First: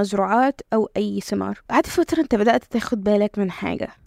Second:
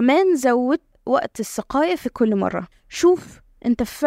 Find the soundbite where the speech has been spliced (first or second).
first